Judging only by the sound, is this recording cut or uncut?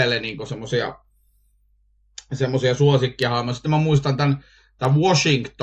uncut